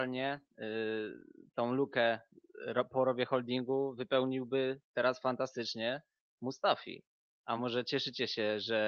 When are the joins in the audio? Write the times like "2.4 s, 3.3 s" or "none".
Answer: none